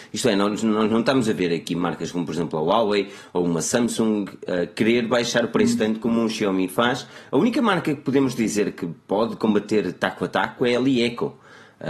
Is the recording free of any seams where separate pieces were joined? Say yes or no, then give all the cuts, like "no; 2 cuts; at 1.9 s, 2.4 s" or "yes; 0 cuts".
yes; 0 cuts